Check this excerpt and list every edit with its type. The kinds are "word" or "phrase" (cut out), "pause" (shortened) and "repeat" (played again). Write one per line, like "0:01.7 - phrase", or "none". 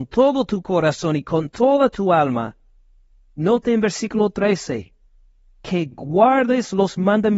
none